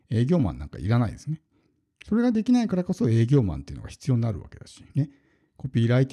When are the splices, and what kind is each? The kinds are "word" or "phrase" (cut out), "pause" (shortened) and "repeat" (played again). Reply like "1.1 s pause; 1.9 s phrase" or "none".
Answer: 4.9 s pause